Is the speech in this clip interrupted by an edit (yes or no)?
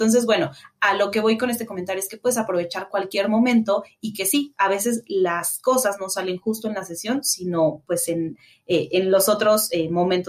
no